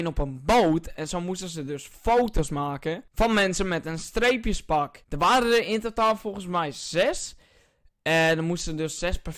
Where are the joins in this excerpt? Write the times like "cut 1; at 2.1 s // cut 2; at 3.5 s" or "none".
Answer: none

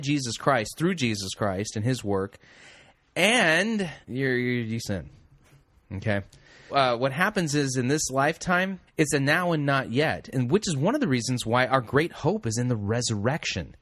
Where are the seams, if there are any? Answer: cut 1; at 4.0 s // cut 2; at 4.8 s // cut 3; at 6.7 s // cut 4; at 8.9 s

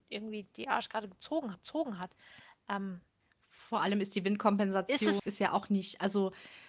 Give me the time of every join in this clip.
cut 1; at 1.5 s // cut 2; at 3.2 s // cut 3; at 5.2 s

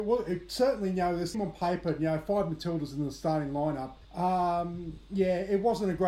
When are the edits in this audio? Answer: cut 1; at 1.3 s // cut 2; at 4.0 s

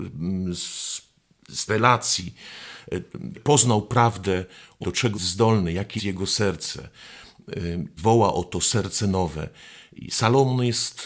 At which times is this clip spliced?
cut 1; at 1.7 s // cut 2; at 3.3 s // cut 3; at 4.8 s // cut 4; at 5.1 s // cut 5; at 6.0 s // cut 6; at 8.0 s

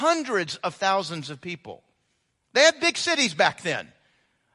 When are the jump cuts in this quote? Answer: none

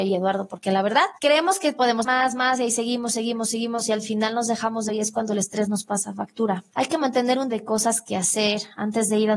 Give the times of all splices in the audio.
cut 1; at 1.2 s // cut 2; at 2.0 s // cut 3; at 4.9 s // cut 4; at 6.7 s // cut 5; at 7.5 s

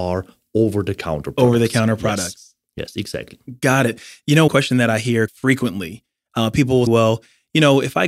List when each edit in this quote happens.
cut 1; at 4.5 s // cut 2; at 5.3 s // cut 3; at 6.9 s

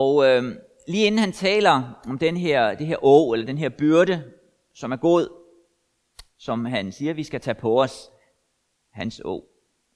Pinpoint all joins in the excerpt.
none

